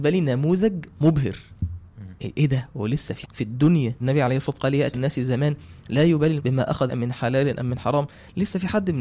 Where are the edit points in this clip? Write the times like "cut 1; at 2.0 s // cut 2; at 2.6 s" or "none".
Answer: cut 1; at 2.2 s // cut 2; at 3.2 s // cut 3; at 4.0 s // cut 4; at 4.5 s // cut 5; at 4.9 s // cut 6; at 6.4 s // cut 7; at 6.9 s